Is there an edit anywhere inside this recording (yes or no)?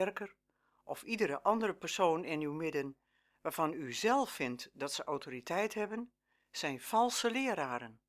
no